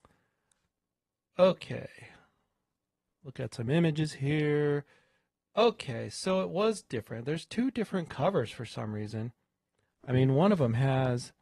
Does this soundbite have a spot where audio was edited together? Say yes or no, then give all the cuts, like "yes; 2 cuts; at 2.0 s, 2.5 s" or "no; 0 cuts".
no; 0 cuts